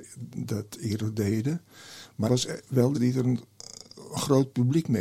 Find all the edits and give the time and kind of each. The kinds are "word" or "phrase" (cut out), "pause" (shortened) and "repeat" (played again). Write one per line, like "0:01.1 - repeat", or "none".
0:02.3 - word
0:02.9 - word